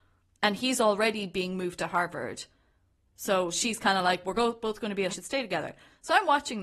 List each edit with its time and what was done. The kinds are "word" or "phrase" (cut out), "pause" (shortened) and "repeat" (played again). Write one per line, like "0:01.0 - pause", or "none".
0:04.2 - word
0:05.1 - phrase